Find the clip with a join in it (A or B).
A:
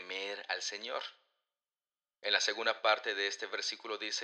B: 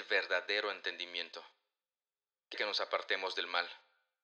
B